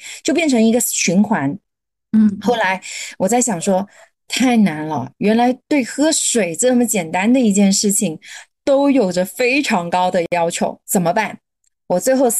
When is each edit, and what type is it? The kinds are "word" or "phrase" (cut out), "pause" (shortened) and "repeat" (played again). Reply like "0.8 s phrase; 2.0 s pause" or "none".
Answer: none